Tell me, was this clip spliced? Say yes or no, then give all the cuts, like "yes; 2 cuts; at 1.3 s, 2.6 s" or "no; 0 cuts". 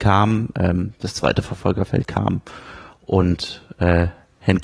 no; 0 cuts